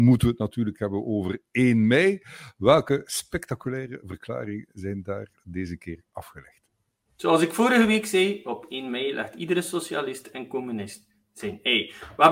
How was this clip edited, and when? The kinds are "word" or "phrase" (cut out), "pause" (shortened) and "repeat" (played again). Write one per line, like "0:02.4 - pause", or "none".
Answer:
none